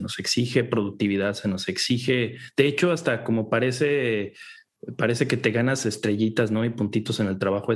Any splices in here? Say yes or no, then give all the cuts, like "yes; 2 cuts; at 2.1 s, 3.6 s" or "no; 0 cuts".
no; 0 cuts